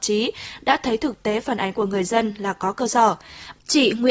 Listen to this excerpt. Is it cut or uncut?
uncut